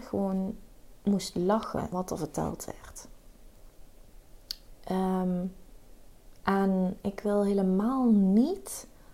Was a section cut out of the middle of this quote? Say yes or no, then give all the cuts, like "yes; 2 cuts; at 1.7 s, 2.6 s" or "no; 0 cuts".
yes; 1 cut; at 1.9 s